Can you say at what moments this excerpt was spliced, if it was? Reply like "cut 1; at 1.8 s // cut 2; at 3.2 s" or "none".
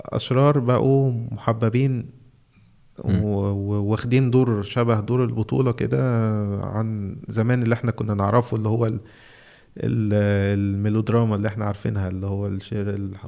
none